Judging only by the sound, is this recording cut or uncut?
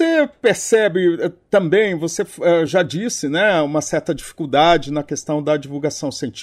uncut